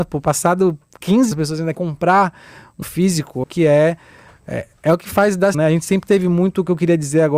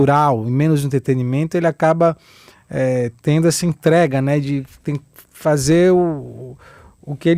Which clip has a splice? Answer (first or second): first